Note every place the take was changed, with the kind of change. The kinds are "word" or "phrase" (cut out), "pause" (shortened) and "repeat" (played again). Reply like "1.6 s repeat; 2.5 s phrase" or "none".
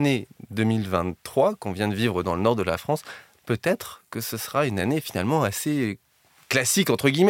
none